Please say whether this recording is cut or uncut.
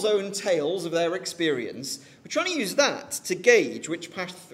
uncut